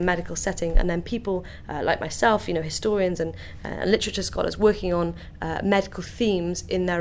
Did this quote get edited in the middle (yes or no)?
no